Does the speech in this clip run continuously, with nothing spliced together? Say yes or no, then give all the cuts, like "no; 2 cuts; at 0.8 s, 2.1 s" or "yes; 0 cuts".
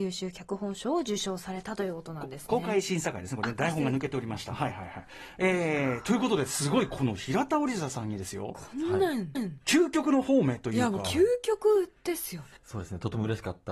no; 2 cuts; at 9.3 s, 12.6 s